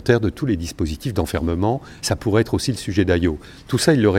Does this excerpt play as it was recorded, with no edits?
yes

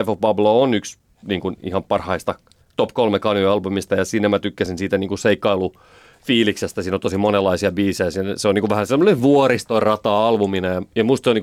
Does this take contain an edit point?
no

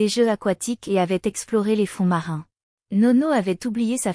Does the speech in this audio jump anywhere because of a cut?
yes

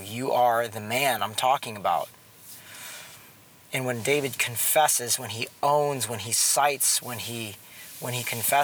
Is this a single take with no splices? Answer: yes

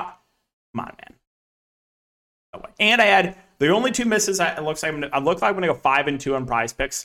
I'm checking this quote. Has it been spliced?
no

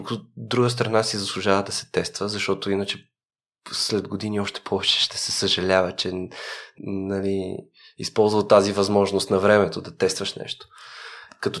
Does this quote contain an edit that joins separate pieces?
yes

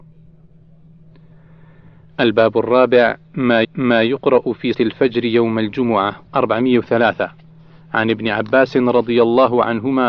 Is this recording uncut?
no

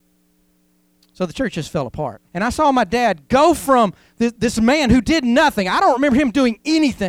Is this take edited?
yes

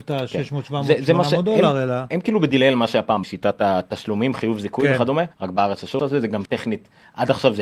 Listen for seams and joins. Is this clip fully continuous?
no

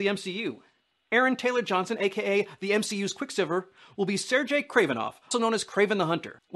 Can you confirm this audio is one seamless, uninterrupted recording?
no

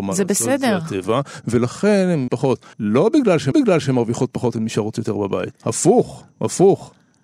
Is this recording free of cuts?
no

